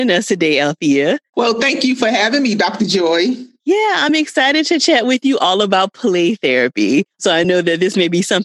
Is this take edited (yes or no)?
no